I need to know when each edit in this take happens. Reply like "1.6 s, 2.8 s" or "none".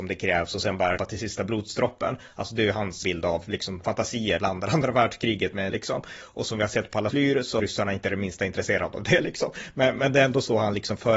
1.0 s, 3.0 s, 3.8 s, 4.4 s, 5.7 s, 7.1 s, 7.6 s